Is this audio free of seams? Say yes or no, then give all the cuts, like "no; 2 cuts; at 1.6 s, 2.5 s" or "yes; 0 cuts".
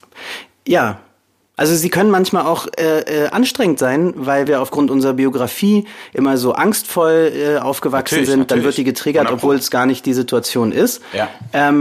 no; 1 cut; at 4.5 s